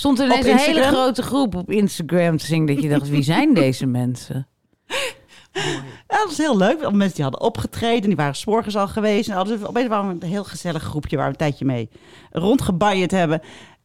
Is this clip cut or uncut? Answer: uncut